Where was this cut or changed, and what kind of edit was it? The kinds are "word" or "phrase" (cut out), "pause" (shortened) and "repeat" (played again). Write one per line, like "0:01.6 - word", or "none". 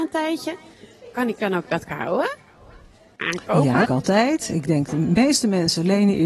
0:01.9 - word
0:03.9 - phrase